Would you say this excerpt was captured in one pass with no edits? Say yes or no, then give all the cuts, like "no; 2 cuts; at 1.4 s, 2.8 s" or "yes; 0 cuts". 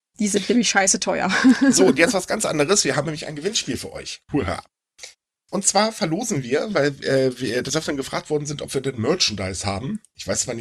yes; 0 cuts